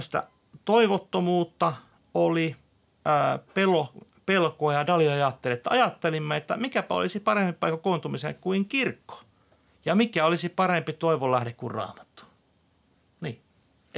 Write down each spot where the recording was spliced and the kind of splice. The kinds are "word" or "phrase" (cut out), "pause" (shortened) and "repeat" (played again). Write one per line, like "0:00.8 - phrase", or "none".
none